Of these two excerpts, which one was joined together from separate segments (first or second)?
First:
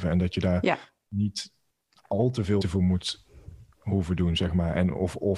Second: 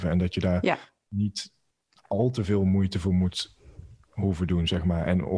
first